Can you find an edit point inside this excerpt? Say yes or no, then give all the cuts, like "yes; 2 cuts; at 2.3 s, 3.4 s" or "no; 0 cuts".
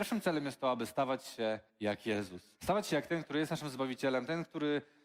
yes; 2 cuts; at 1.7 s, 2.6 s